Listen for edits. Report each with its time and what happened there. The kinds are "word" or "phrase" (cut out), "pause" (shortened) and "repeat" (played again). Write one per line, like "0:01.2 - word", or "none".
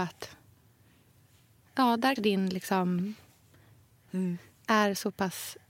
0:02.2 - word
0:04.1 - word